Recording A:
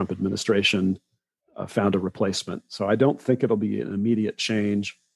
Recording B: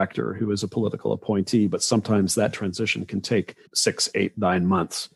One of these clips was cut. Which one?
B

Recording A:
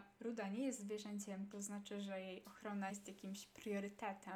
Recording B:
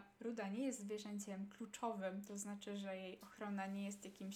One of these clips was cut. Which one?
A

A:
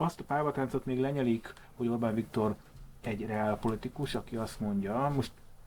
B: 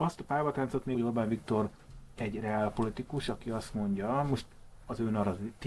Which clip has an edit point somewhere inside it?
B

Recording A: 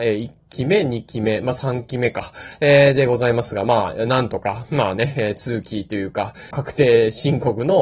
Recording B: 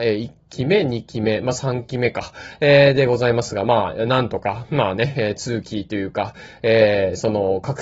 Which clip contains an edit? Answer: A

